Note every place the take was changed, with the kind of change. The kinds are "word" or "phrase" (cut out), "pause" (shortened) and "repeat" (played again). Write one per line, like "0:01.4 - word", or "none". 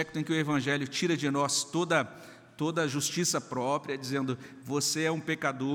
none